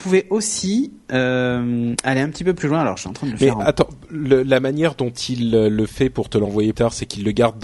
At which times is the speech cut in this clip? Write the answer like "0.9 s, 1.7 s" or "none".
6.7 s